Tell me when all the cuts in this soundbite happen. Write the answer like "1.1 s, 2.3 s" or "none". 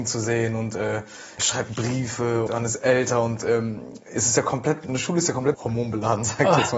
1.4 s, 2.5 s, 4.9 s, 5.5 s